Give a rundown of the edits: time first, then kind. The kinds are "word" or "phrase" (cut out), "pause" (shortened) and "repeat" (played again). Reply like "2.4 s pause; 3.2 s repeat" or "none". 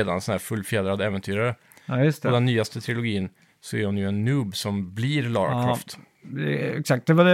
none

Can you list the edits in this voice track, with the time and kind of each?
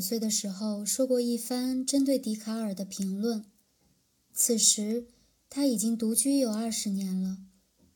none

